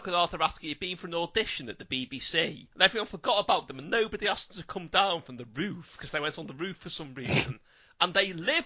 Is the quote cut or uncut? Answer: uncut